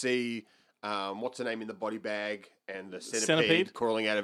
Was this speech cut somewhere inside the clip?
no; 0 cuts

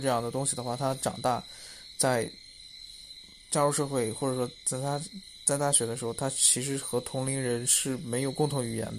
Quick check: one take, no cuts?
yes; 0 cuts

